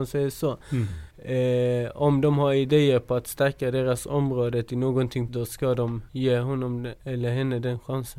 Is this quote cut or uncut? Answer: cut